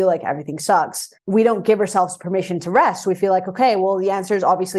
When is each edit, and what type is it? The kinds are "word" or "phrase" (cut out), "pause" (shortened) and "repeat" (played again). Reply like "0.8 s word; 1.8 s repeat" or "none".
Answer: 1.2 s pause